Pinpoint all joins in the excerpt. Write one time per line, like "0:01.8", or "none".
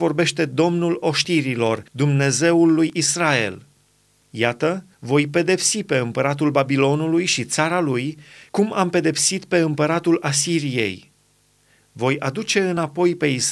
0:01.9
0:04.9